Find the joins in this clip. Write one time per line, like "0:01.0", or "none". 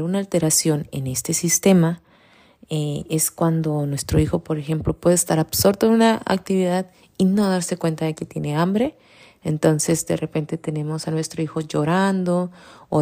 none